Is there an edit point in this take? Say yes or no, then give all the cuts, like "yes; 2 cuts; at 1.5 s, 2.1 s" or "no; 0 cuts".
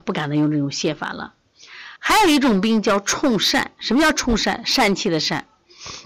yes; 1 cut; at 2.0 s